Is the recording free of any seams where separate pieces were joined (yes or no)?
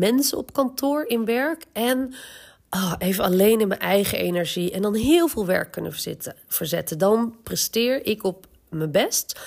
yes